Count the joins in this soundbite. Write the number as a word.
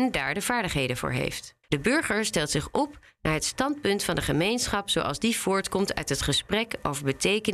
one